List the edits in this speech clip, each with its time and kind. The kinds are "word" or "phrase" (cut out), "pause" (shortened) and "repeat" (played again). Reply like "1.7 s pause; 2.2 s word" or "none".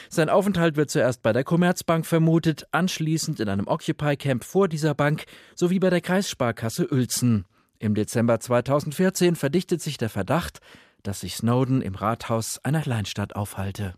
12.8 s word